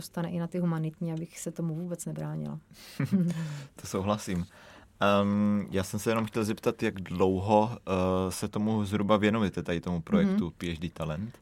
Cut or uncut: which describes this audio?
uncut